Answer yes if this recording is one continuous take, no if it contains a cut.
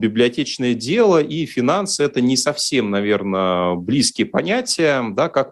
yes